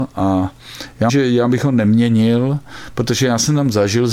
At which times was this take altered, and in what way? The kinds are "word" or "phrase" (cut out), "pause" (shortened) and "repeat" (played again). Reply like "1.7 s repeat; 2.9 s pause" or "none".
1.1 s word